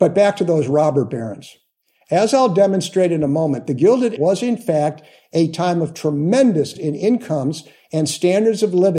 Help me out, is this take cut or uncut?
cut